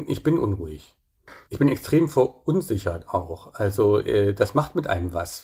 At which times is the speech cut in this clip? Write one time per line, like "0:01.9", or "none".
0:01.4